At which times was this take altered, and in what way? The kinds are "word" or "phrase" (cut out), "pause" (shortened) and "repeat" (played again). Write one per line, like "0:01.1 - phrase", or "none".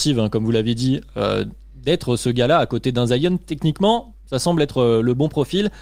none